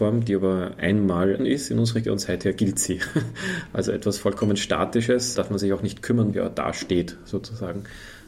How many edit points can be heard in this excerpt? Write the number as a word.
four